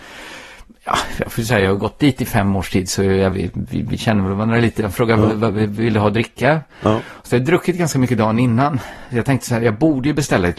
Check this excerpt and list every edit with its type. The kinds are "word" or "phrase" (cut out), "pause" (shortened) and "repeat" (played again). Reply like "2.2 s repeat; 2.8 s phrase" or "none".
none